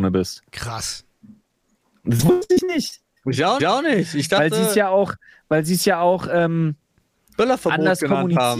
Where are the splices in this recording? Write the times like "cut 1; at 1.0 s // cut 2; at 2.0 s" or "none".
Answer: cut 1; at 3.6 s